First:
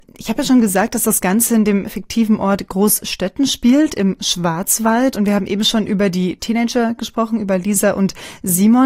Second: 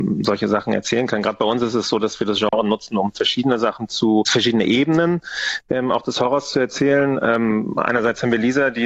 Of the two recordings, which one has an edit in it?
second; 1 cut; at 4.2 s

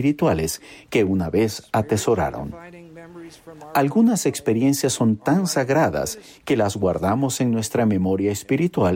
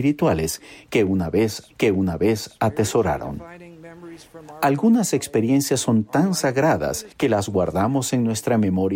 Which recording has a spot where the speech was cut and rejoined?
second; 2 cuts; at 1.7 s, 7.1 s

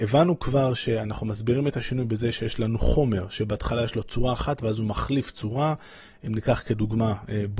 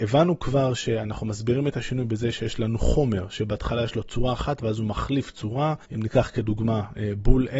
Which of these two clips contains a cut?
second; 1 cut; at 5.8 s

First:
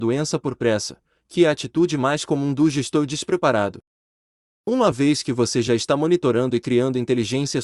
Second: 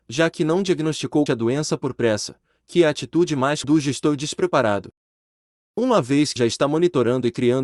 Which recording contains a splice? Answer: second; 3 cuts; at 1.3 s, 3.6 s, 6.4 s

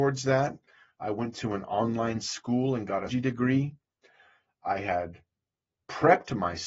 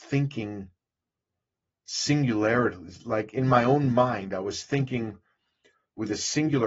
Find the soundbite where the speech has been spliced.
first; 1 cut; at 3.1 s

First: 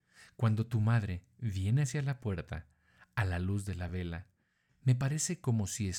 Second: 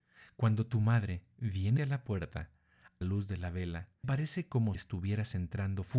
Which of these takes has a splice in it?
second; 4 cuts; at 1.8 s, 3.0 s, 4.0 s, 4.7 s

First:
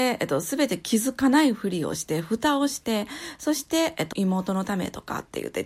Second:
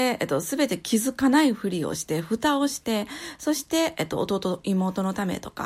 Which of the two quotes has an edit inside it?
first; 1 cut; at 4.1 s

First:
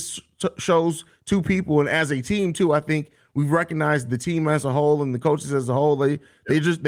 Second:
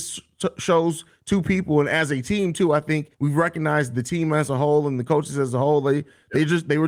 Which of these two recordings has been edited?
second; 1 cut; at 3.1 s

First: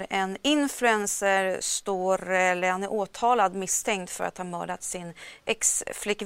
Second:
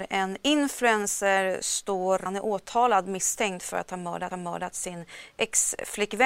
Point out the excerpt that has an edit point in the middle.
second; 2 cuts; at 2.3 s, 4.3 s

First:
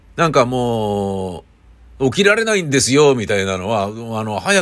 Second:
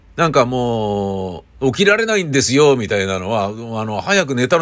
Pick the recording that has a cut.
second; 1 cut; at 1.5 s

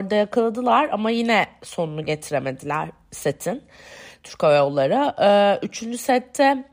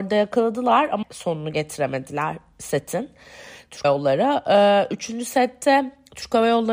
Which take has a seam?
second; 2 cuts; at 1.0 s, 3.8 s

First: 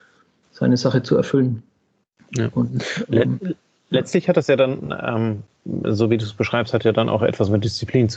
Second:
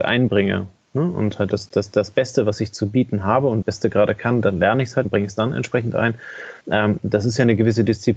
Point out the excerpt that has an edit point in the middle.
second; 4 cuts; at 1.5 s, 3.6 s, 5.0 s, 6.6 s

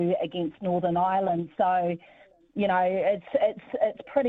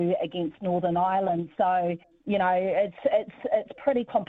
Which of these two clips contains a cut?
second; 1 cut; at 2.0 s

